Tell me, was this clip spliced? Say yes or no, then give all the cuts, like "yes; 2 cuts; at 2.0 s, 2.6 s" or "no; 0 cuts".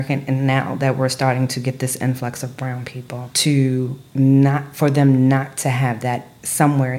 yes; 1 cut; at 4.1 s